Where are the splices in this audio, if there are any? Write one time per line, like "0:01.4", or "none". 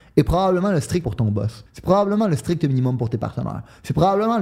0:01.0
0:01.7